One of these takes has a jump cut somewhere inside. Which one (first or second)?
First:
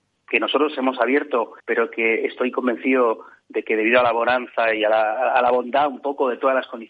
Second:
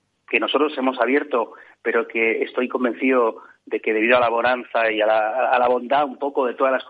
first